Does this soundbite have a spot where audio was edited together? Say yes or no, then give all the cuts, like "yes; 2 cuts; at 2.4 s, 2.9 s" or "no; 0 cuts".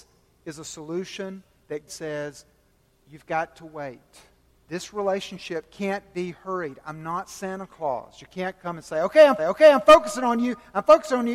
yes; 3 cuts; at 1.9 s, 4.5 s, 9.4 s